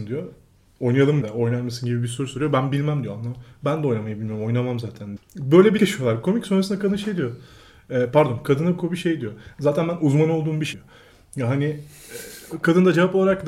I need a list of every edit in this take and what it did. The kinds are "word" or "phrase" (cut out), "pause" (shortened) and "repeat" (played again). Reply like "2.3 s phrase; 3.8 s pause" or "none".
1.2 s word; 5.2 s word; 5.8 s word; 10.7 s word